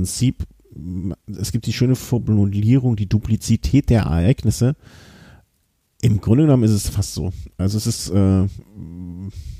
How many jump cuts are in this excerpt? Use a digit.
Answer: 0